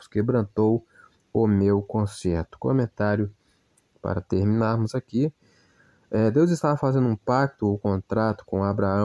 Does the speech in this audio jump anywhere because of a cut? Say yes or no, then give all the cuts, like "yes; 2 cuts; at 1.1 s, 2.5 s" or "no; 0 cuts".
no; 0 cuts